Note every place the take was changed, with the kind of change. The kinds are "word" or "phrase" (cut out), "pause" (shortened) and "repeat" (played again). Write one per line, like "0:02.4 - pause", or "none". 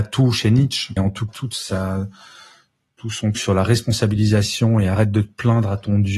0:01.0 - word
0:01.3 - word
0:03.3 - word